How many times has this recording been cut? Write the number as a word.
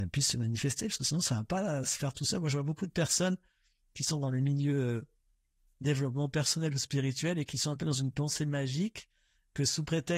zero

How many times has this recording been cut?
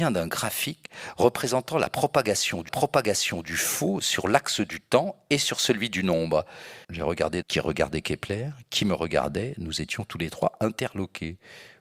three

